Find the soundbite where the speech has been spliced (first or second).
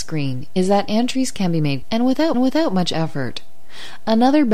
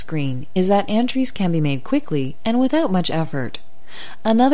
first